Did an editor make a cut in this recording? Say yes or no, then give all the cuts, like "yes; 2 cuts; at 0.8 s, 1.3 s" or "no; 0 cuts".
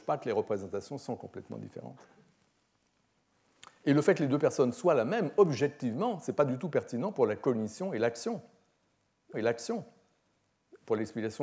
yes; 1 cut; at 9.3 s